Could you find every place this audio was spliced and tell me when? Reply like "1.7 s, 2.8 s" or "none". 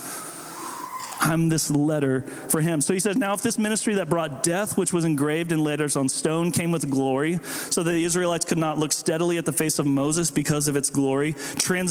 none